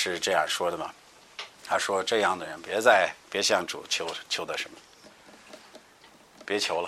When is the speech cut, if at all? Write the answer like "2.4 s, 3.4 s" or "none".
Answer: 1.5 s